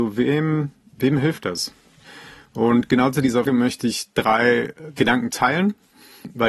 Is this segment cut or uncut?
cut